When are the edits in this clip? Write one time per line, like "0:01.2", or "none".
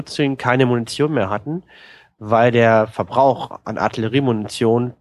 none